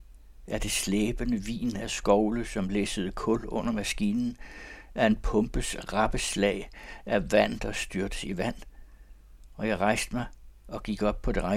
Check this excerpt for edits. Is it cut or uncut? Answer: uncut